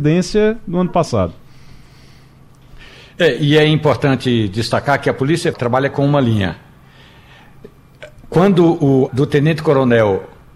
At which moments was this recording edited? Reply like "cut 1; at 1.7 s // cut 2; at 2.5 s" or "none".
cut 1; at 5.5 s // cut 2; at 9.1 s

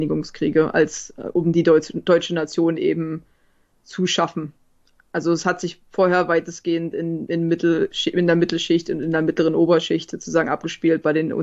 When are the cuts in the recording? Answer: none

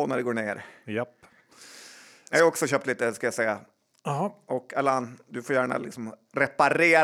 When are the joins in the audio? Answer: none

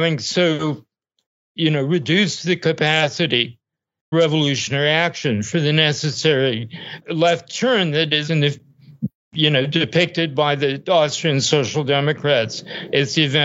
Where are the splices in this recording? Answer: cut 1; at 4.1 s // cut 2; at 7.0 s // cut 3; at 8.3 s

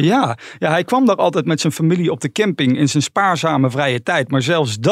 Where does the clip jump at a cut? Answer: none

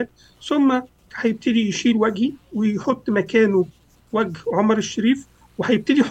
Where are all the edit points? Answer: cut 1; at 1.1 s

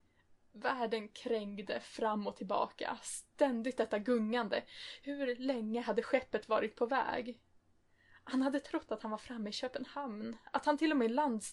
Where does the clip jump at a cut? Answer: none

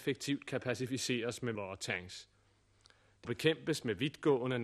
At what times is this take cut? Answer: cut 1; at 1.5 s // cut 2; at 3.2 s

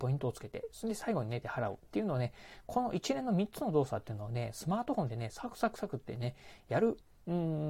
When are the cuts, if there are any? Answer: cut 1; at 1.4 s

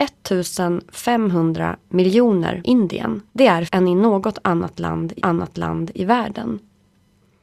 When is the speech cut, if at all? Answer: cut 1; at 2.6 s // cut 2; at 3.3 s // cut 3; at 3.7 s // cut 4; at 5.2 s

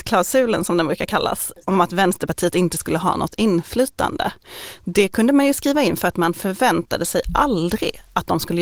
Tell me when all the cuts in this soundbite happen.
none

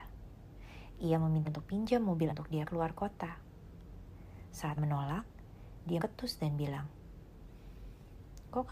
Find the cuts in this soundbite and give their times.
cut 1; at 1.4 s // cut 2; at 2.3 s // cut 3; at 2.6 s // cut 4; at 4.8 s // cut 5; at 6.0 s

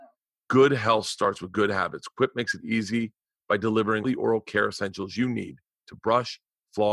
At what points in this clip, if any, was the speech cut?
cut 1; at 4.0 s

